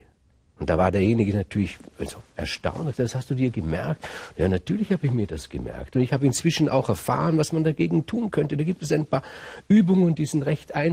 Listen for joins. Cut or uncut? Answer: uncut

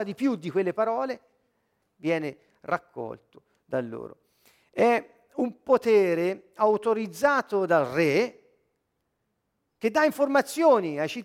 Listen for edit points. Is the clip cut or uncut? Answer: uncut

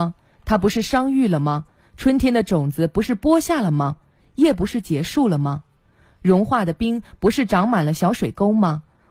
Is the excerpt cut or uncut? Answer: uncut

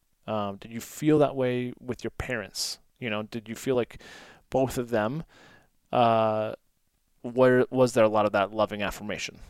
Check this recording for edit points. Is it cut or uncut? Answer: uncut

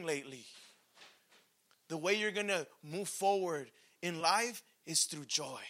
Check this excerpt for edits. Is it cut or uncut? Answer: uncut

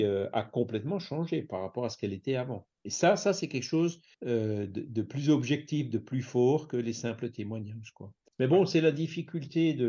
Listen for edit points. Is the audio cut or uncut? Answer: cut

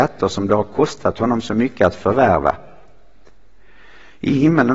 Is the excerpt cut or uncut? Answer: uncut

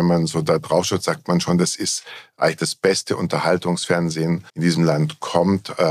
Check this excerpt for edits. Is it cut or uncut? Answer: cut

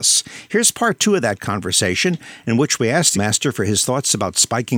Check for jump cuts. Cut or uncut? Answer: cut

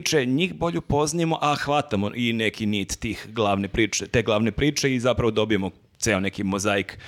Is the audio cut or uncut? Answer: uncut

